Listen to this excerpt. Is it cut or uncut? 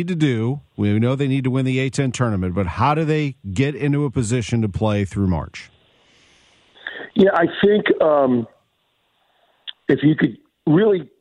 uncut